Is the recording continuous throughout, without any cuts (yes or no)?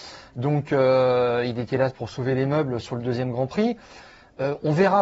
yes